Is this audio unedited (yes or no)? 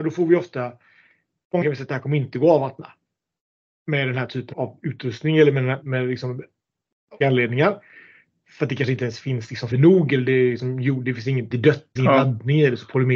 no